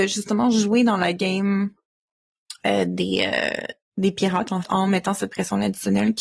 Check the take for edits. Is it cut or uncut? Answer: cut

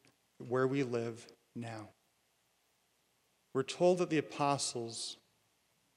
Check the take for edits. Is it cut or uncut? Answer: uncut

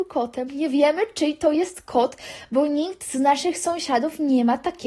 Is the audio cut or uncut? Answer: uncut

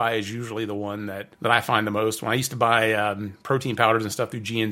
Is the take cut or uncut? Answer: uncut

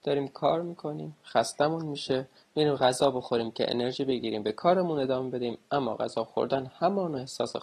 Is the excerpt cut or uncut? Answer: uncut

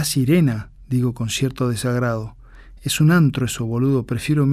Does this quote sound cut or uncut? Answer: uncut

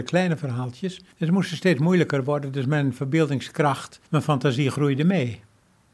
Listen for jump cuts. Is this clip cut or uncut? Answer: cut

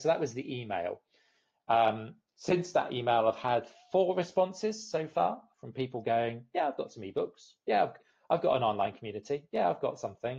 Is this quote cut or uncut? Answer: uncut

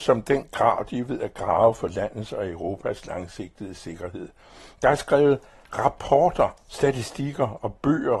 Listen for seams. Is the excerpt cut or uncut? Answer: uncut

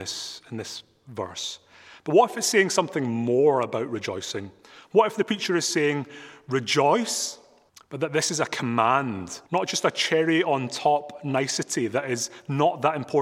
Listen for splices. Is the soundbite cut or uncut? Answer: cut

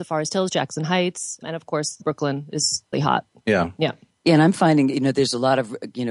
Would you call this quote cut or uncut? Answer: cut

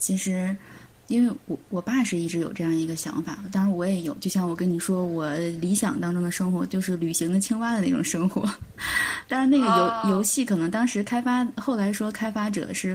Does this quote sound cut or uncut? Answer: cut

